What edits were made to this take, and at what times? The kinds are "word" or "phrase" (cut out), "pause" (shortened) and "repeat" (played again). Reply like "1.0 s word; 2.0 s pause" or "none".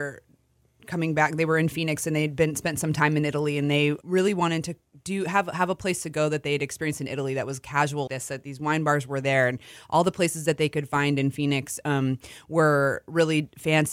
4.0 s word; 4.8 s pause; 8.1 s word